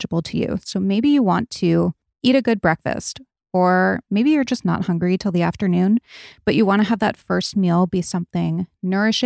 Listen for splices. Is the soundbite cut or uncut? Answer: uncut